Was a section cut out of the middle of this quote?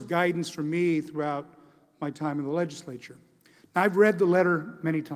no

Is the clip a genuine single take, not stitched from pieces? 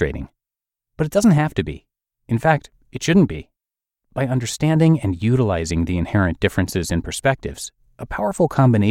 yes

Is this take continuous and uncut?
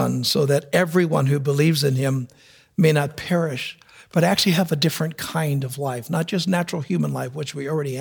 yes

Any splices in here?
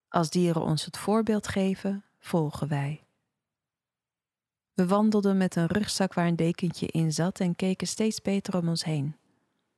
no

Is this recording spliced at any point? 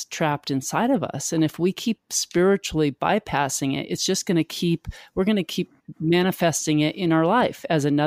no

